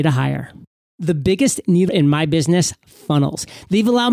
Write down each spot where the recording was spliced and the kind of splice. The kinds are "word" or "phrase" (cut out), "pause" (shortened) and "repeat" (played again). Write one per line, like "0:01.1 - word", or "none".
0:01.9 - word